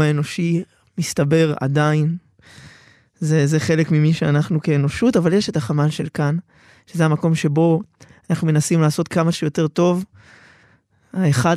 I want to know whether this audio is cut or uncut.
uncut